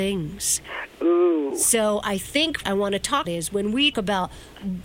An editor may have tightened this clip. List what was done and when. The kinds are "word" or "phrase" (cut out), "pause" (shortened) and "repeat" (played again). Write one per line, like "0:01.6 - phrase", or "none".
0:02.6 - word
0:03.2 - word
0:03.9 - word